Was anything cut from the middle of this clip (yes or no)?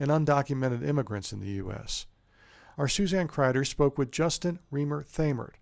no